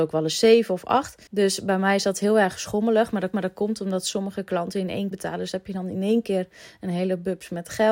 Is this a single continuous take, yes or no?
no